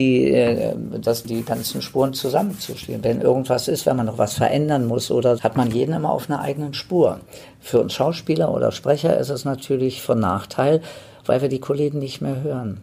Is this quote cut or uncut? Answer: cut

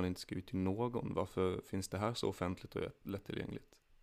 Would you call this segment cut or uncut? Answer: uncut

